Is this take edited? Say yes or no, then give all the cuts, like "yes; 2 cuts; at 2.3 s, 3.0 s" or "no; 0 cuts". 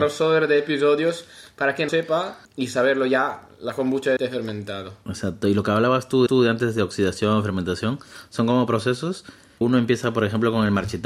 yes; 5 cuts; at 1.9 s, 2.4 s, 4.2 s, 6.3 s, 9.6 s